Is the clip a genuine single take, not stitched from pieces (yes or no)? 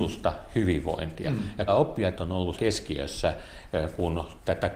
no